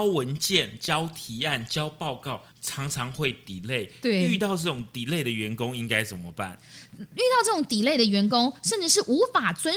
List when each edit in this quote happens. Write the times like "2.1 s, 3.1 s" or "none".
2.5 s